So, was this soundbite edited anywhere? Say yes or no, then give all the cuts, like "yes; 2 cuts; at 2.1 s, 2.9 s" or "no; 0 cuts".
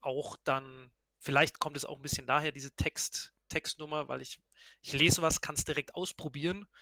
no; 0 cuts